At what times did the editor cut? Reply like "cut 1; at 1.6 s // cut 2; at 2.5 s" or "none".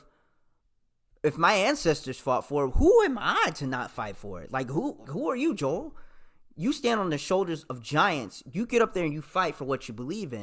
cut 1; at 5.0 s

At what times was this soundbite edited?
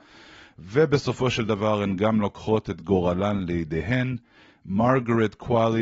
none

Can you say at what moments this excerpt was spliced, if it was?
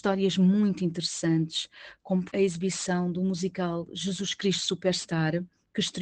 cut 1; at 2.3 s

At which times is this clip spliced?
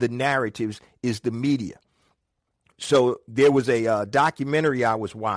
none

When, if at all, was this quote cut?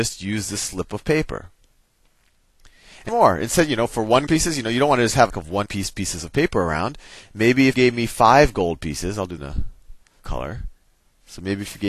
cut 1; at 3.1 s // cut 2; at 4.3 s // cut 3; at 5.3 s // cut 4; at 5.7 s // cut 5; at 7.7 s // cut 6; at 9.4 s // cut 7; at 10.2 s

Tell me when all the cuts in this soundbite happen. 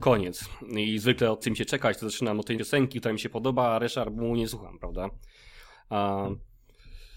cut 1; at 1.4 s // cut 2; at 2.5 s

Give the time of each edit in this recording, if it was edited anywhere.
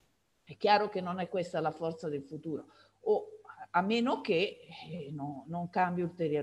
none

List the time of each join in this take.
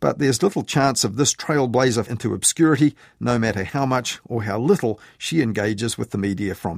cut 1; at 2.1 s

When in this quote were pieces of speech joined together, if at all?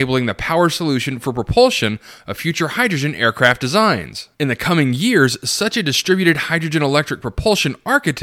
cut 1; at 4.3 s

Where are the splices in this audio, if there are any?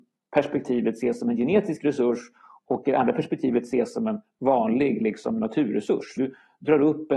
cut 1; at 6.2 s

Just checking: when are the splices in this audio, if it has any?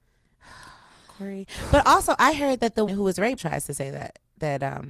cut 1; at 2.9 s // cut 2; at 3.4 s

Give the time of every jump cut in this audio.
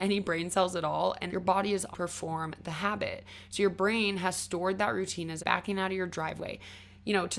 cut 1; at 1.3 s // cut 2; at 1.9 s // cut 3; at 5.4 s

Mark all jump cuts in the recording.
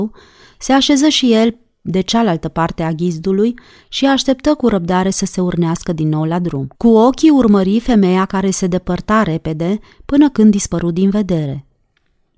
cut 1; at 6.7 s

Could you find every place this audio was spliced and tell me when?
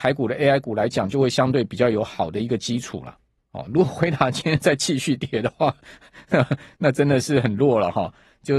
none

